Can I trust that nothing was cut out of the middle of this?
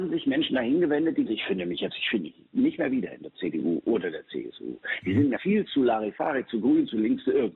no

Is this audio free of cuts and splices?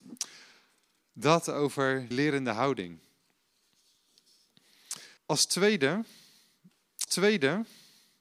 no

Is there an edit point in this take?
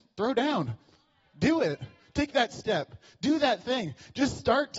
no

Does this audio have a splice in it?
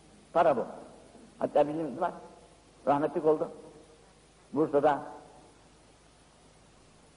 yes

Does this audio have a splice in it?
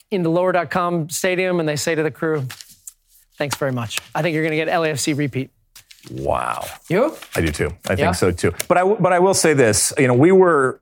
no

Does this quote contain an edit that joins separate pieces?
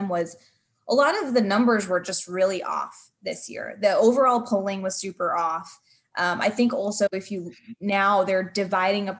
no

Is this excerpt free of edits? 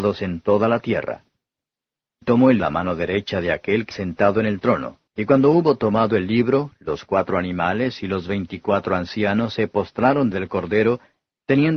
no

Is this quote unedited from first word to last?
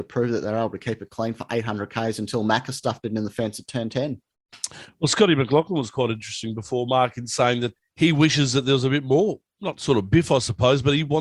no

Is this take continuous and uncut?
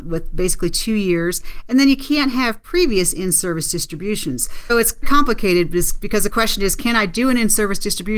no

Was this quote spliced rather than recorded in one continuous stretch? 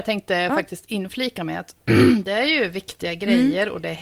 no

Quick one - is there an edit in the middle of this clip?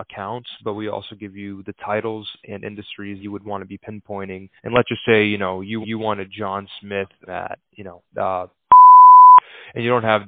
yes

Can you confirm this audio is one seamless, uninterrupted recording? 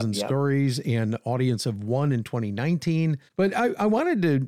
no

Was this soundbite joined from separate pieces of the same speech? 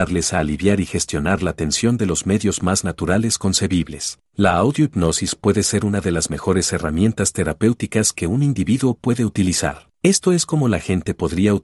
yes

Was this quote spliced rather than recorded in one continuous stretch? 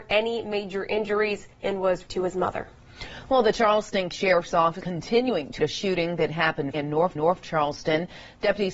yes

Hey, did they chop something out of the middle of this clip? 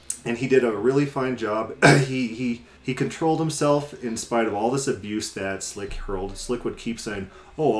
yes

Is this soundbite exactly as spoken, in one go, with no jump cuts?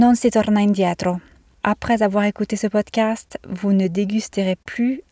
yes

